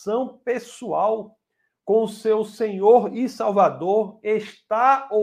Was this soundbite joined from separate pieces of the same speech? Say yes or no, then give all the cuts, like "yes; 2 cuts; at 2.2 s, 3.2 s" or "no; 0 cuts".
no; 0 cuts